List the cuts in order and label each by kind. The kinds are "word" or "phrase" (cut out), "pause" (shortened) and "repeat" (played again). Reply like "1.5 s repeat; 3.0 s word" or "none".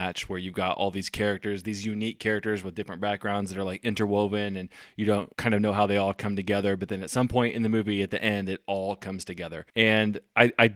5.3 s pause; 9.7 s pause